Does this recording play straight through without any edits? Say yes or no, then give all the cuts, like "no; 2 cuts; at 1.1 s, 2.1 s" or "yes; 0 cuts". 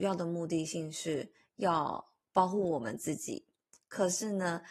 yes; 0 cuts